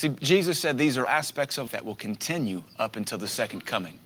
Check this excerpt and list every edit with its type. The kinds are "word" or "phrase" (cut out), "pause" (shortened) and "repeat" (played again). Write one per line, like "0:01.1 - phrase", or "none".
0:01.1 - word
0:01.7 - word